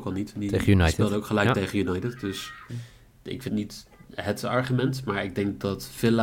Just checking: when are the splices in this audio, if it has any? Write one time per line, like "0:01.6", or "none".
0:02.7
0:03.5

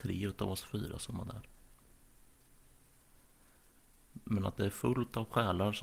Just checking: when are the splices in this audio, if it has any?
none

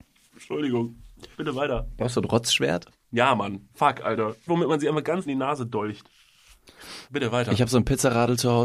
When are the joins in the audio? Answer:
0:01.3
0:02.9
0:04.5
0:05.3
0:07.0

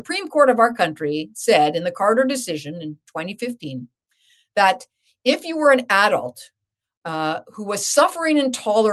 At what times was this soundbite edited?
none

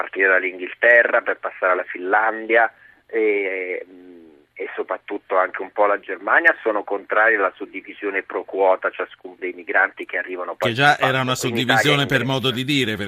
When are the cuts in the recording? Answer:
0:09.4

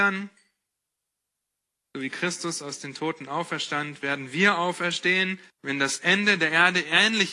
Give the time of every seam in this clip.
0:05.5

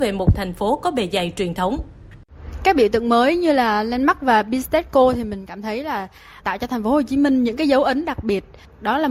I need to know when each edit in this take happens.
0:06.4

